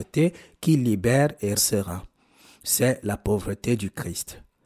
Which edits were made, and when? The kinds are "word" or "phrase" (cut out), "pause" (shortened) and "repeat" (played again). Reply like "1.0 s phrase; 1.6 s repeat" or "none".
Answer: 1.6 s word

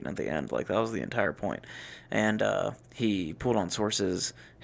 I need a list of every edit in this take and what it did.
2.8 s pause

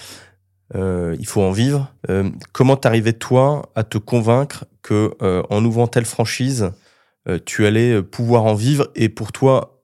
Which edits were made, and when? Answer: 2.0 s pause

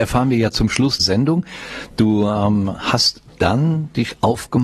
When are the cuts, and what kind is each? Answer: 1.0 s word

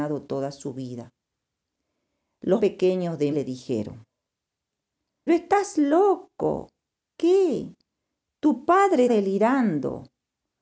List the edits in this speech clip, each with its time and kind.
2.6 s word; 3.3 s word; 5.3 s word; 7.2 s word; 9.1 s word

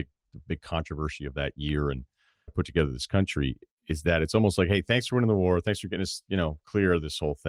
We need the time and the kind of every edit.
2.5 s word

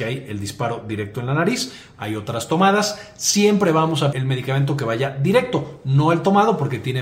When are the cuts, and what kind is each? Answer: 4.1 s word

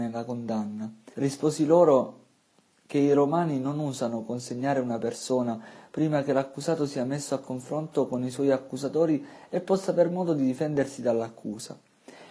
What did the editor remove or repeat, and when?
1.1 s pause

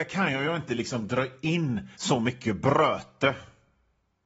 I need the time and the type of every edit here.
1.9 s pause

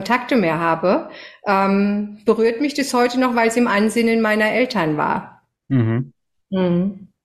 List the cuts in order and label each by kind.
none

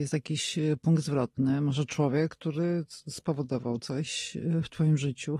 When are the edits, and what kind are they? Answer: none

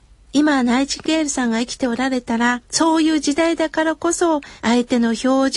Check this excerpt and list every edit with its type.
2.6 s pause; 4.6 s pause

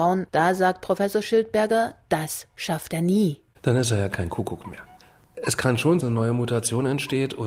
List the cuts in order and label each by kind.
6.0 s phrase

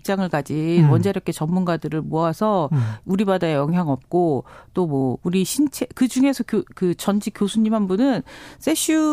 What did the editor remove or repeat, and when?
none

